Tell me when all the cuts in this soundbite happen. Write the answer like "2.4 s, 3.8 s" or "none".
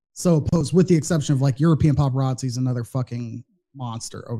none